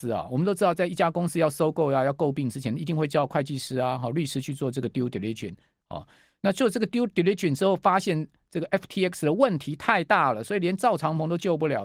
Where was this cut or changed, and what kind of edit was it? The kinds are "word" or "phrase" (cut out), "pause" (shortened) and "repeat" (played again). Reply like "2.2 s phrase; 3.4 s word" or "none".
none